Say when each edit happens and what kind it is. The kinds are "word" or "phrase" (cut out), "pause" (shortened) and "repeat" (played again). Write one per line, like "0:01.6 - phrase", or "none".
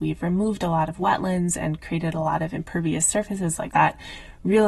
0:03.7 - word